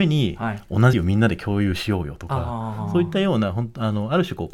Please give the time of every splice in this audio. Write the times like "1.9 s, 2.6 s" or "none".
0.9 s